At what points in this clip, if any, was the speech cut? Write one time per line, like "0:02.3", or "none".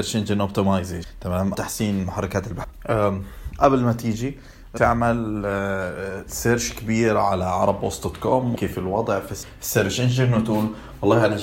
0:01.5
0:04.8
0:08.5